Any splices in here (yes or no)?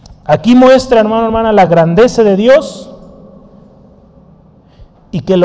no